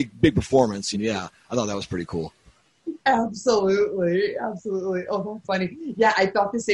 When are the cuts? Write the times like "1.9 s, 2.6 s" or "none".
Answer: 0.9 s, 3.0 s, 5.4 s